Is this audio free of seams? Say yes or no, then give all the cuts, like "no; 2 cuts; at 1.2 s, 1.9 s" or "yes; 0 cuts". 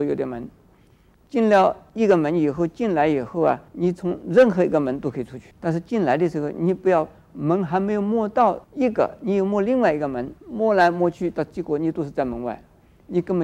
no; 4 cuts; at 3.7 s, 5.5 s, 8.6 s, 10.4 s